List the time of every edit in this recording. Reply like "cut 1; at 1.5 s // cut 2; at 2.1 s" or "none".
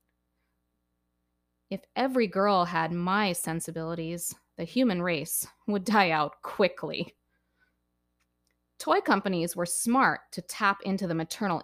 none